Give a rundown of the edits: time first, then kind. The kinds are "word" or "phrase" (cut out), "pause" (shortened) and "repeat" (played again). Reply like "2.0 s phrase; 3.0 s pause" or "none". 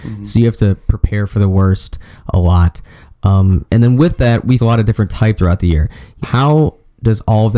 3.7 s pause; 4.6 s word; 5.4 s phrase; 6.2 s word